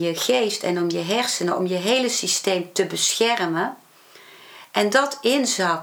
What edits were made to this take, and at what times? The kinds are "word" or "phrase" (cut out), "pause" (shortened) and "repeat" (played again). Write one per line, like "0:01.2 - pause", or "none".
none